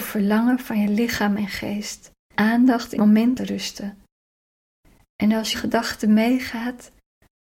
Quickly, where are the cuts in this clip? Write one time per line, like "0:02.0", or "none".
0:02.3
0:03.0
0:03.4
0:05.5